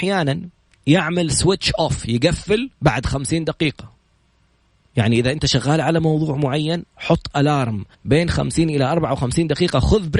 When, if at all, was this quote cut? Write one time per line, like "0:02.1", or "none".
0:02.7
0:07.9